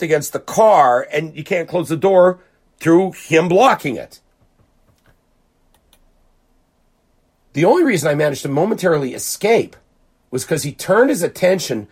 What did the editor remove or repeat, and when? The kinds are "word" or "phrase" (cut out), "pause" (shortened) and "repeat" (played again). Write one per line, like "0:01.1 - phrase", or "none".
0:02.7 - word